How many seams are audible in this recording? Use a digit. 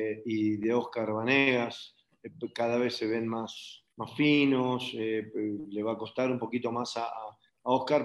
1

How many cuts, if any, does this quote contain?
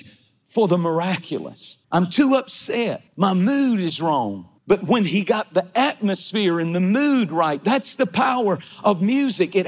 3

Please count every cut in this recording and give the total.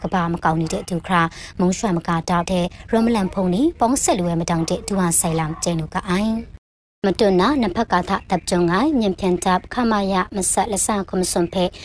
1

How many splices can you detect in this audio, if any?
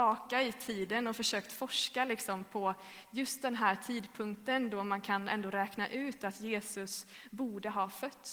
0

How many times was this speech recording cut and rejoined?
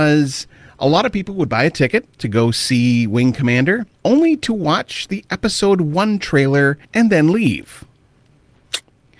3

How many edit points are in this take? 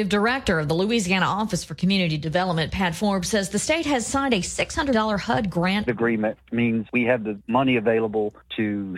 2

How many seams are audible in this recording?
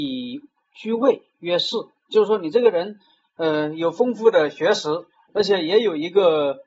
0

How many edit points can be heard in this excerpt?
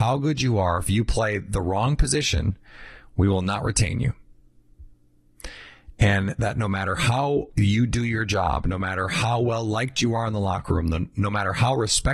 1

